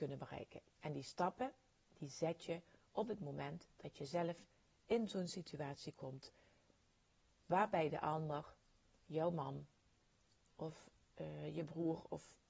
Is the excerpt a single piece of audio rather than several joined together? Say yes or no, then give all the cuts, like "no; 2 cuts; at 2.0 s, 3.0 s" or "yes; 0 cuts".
yes; 0 cuts